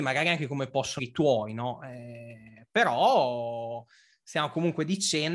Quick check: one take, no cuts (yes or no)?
no